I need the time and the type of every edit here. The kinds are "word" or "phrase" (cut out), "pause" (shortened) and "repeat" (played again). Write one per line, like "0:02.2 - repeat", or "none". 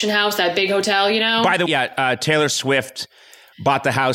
0:01.7 - word

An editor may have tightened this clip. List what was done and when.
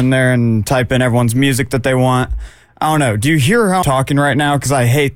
0:03.8 - word

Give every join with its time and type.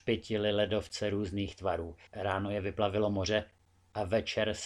0:02.1 - pause

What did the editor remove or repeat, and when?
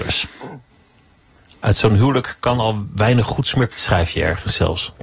0:03.7 - word

